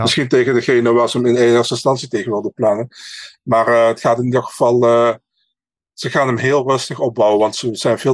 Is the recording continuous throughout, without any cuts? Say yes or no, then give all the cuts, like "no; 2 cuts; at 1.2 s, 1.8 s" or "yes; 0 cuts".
yes; 0 cuts